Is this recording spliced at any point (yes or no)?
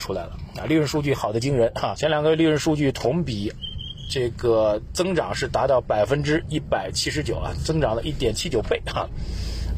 yes